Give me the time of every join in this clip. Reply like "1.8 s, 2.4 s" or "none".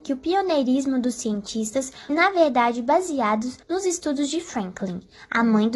2.1 s, 3.6 s